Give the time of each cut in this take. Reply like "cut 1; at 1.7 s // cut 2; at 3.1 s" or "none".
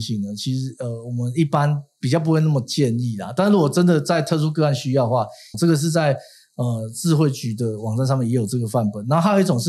cut 1; at 5.5 s